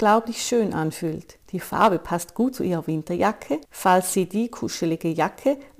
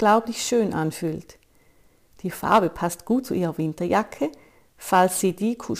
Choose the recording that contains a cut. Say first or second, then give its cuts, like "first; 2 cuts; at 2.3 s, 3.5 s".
first; 2 cuts; at 1.4 s, 3.6 s